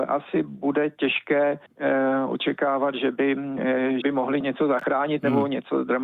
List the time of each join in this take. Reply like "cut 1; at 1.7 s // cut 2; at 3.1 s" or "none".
cut 1; at 1.7 s // cut 2; at 4.0 s // cut 3; at 4.4 s